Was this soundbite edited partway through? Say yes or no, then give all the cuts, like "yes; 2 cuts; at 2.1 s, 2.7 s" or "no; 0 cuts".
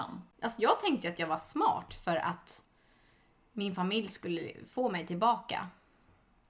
no; 0 cuts